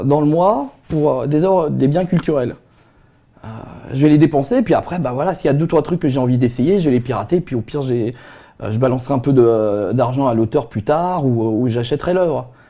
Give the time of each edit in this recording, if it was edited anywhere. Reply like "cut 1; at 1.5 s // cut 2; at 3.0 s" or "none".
none